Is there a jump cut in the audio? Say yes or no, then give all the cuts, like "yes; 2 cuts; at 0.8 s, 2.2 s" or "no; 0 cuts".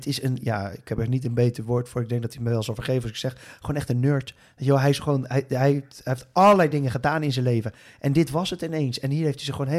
no; 0 cuts